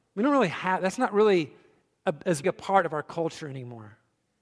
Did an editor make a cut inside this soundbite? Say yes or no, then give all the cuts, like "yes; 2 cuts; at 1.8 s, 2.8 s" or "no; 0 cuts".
yes; 1 cut; at 2.4 s